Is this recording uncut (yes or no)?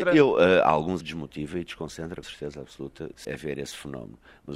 no